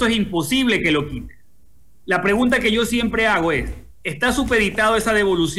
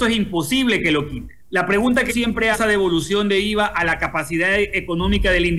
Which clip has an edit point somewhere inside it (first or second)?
second